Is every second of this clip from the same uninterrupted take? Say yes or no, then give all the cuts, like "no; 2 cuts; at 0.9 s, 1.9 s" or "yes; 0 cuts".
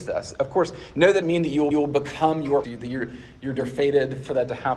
no; 4 cuts; at 1.2 s, 1.7 s, 2.6 s, 3.6 s